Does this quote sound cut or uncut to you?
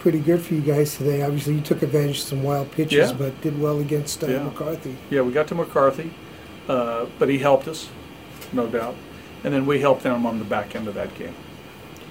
uncut